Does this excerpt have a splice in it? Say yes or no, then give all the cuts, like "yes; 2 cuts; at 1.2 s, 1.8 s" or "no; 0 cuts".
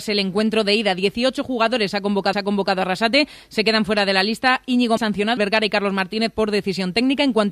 yes; 3 cuts; at 2.3 s, 5.0 s, 5.4 s